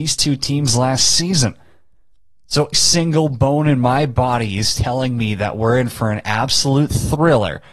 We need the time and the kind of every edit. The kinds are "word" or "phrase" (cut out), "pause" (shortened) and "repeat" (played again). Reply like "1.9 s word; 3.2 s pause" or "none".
2.7 s word